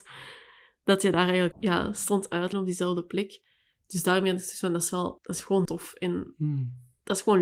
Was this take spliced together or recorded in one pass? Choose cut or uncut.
cut